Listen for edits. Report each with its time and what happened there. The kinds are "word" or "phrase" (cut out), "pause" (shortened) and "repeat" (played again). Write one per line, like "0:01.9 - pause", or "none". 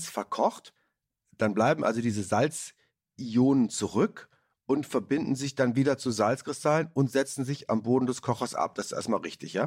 none